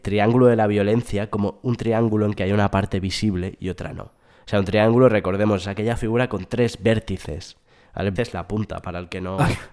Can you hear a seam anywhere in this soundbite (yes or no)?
yes